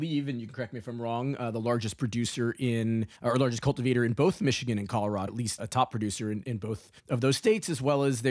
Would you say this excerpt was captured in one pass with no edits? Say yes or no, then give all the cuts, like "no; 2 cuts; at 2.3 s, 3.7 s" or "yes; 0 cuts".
no; 5 cuts; at 3.1 s, 5.3 s, 5.6 s, 6.4 s, 7.0 s